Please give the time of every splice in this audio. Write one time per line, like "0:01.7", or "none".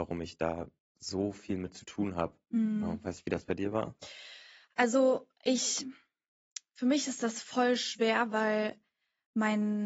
none